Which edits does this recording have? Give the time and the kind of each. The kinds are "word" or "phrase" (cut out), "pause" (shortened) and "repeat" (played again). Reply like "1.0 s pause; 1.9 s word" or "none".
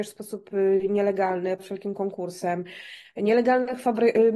1.6 s word